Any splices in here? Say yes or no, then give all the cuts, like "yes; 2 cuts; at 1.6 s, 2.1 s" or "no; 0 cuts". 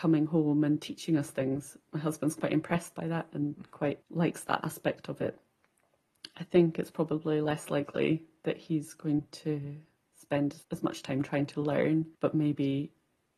yes; 3 cuts; at 4.0 s, 10.6 s, 12.1 s